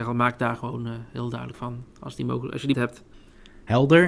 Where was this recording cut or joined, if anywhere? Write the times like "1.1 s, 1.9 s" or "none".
1.5 s, 2.7 s